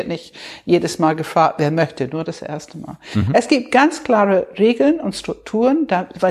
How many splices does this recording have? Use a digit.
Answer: 0